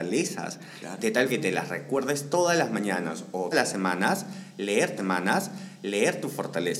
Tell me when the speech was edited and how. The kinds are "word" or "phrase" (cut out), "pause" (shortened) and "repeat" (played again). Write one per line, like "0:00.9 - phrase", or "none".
0:01.3 - word
0:03.5 - word
0:05.0 - repeat